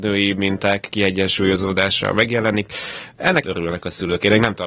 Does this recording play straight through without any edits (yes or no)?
no